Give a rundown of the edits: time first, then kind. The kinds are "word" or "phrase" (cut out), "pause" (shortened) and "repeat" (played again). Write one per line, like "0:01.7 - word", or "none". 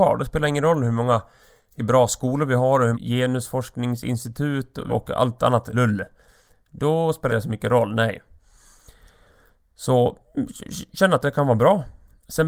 0:01.8 - word
0:02.9 - word
0:04.9 - word
0:05.7 - word
0:07.3 - word

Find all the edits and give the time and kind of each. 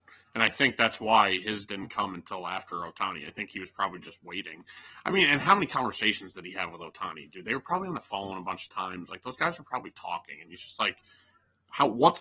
none

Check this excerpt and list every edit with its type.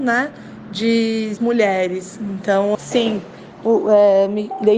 0:01.4 - word
0:02.7 - word

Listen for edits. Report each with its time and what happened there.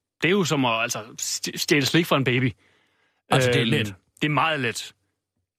none

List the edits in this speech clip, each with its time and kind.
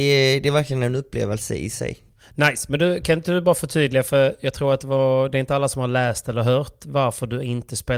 none

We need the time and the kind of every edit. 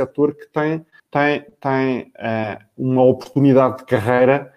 0:01.0 - pause

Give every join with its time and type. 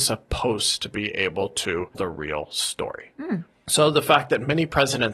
0:01.9 - word

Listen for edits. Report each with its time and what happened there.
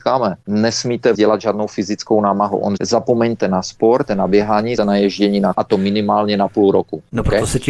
0:01.1 - word
0:02.8 - phrase
0:04.1 - word
0:04.8 - word
0:05.5 - word

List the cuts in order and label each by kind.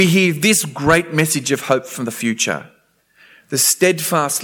none

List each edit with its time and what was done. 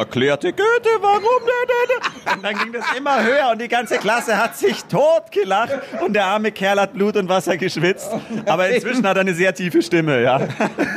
none

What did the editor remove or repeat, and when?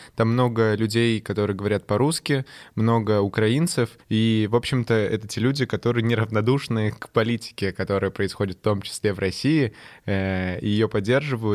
0:04.0 - pause

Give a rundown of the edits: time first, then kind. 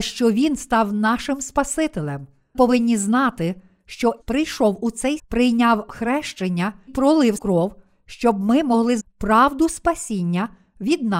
0:02.5 - word
0:04.2 - word
0:05.2 - word
0:06.9 - word
0:07.4 - word
0:09.0 - word

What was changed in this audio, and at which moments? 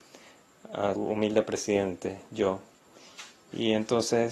0:01.0 - word

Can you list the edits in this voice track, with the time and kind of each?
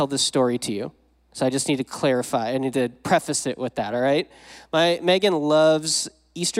none

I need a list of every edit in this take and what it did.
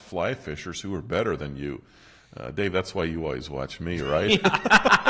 none

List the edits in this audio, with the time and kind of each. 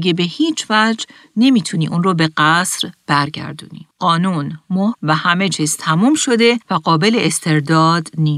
0:03.9 - pause
0:04.9 - word
0:06.6 - pause

